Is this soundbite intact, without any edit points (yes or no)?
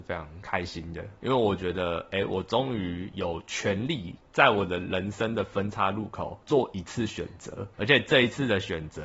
yes